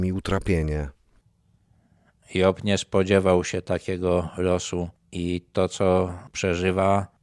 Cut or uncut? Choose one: uncut